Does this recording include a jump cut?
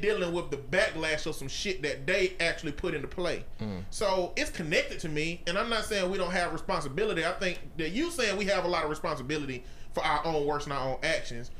no; 0 cuts

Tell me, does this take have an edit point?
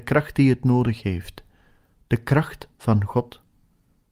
no; 0 cuts

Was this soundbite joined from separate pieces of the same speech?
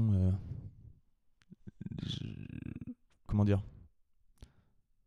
yes; 1 cut; at 3.3 s

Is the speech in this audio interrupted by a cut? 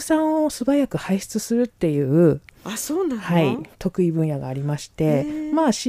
yes; 1 cut; at 3.7 s

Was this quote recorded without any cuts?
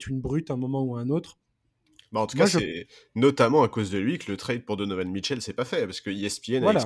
yes; 0 cuts

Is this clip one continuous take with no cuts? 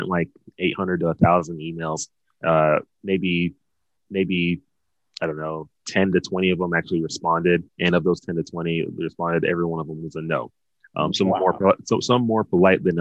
no; 2 cuts; at 4.0 s, 7.7 s

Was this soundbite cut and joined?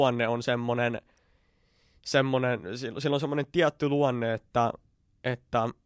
no; 0 cuts

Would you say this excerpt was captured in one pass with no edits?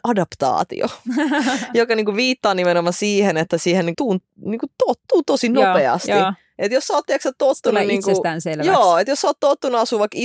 no; 1 cut; at 3.9 s

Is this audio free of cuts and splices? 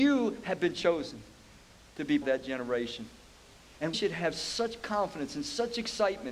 no; 2 cuts; at 2.2 s, 3.9 s

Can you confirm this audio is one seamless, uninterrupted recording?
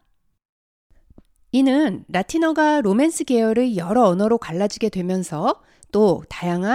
yes; 0 cuts

